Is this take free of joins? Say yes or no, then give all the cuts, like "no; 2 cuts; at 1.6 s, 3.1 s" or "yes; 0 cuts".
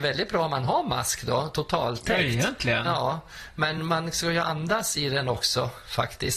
yes; 0 cuts